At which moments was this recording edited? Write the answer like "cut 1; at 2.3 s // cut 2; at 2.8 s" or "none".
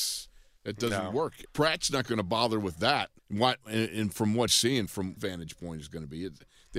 cut 1; at 1.4 s // cut 2; at 3.2 s // cut 3; at 4.5 s // cut 4; at 5.2 s